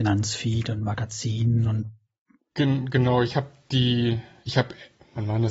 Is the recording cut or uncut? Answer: uncut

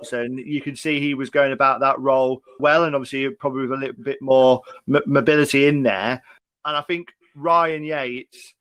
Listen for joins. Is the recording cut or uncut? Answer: cut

